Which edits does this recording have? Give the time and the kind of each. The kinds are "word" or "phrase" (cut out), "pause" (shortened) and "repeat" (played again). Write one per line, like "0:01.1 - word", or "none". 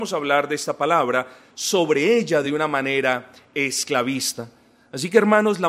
none